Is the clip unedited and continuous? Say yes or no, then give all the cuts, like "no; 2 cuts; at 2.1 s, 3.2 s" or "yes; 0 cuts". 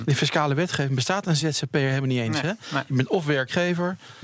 yes; 0 cuts